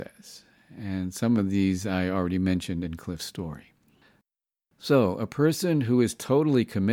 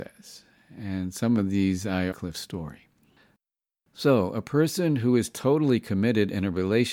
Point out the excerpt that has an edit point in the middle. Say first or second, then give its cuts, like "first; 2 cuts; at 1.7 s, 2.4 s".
second; 1 cut; at 2.1 s